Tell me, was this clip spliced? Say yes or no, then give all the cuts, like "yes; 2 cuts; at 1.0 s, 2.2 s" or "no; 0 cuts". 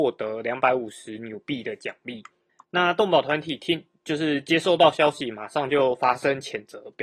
yes; 1 cut; at 2.5 s